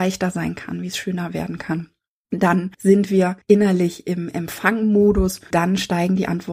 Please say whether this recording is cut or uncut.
cut